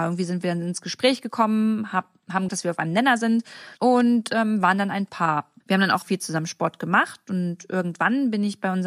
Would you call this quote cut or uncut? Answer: cut